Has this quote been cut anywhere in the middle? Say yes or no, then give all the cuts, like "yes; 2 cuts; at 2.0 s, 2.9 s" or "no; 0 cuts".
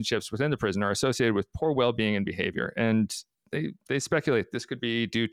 yes; 1 cut; at 3.8 s